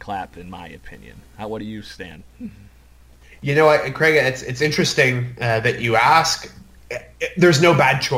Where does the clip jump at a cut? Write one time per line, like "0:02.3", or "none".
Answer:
none